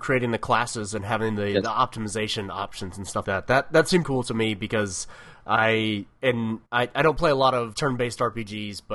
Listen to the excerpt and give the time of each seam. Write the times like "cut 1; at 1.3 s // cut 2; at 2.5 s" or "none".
cut 1; at 3.2 s // cut 2; at 4.0 s // cut 3; at 6.7 s // cut 4; at 7.7 s